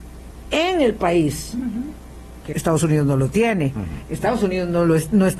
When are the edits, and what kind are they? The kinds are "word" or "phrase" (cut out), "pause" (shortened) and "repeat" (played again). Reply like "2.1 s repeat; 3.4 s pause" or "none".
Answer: 2.5 s word